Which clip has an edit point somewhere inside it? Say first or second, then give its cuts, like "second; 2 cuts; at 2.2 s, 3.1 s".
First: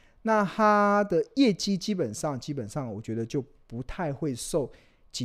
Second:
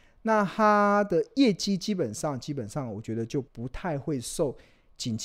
second; 1 cut; at 3.5 s